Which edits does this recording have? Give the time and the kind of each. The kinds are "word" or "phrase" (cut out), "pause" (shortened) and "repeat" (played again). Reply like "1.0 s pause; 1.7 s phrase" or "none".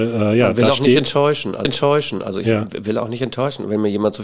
1.6 s repeat